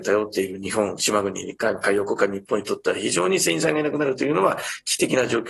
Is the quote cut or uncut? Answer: uncut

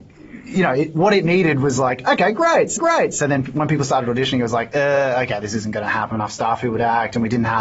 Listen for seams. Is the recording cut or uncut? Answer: cut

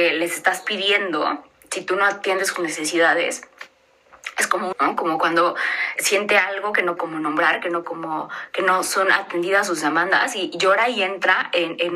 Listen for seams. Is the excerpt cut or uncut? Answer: cut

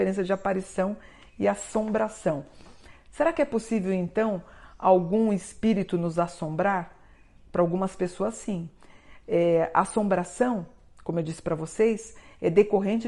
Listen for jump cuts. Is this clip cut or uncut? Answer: uncut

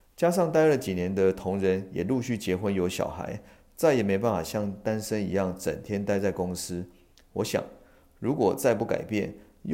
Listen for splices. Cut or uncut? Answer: uncut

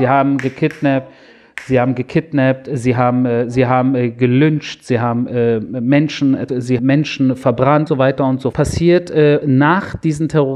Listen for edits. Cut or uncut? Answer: cut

